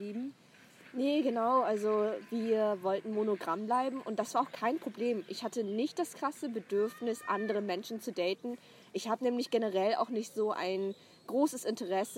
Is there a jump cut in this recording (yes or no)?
no